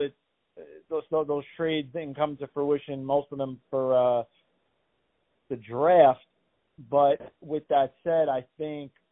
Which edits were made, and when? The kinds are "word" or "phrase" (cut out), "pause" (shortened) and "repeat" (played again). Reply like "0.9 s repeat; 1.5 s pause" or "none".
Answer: none